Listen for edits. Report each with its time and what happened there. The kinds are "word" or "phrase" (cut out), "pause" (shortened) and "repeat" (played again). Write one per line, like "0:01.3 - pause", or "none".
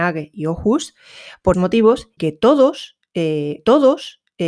0:01.5 - word
0:02.2 - word
0:03.6 - repeat